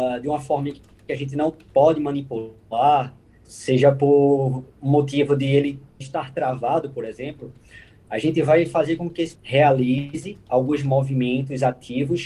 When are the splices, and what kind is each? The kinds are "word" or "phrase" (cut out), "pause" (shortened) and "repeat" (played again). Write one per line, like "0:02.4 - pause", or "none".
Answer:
0:03.5 - word
0:06.0 - word
0:09.4 - word